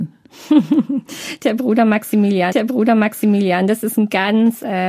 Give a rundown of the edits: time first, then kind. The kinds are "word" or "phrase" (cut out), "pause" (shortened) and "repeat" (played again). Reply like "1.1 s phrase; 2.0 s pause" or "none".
2.5 s repeat